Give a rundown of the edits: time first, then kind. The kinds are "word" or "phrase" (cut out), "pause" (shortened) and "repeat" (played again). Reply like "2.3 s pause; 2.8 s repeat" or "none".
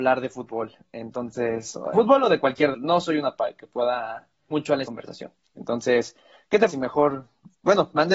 1.9 s word; 2.7 s word; 3.4 s word; 4.5 s word; 4.8 s word; 6.7 s word